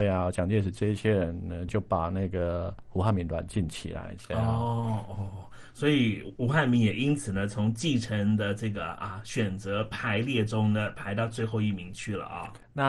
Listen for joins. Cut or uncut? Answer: uncut